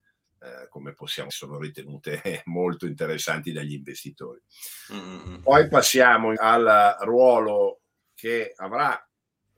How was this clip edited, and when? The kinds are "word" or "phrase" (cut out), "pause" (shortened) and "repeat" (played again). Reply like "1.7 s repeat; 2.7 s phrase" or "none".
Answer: 1.3 s word; 6.4 s word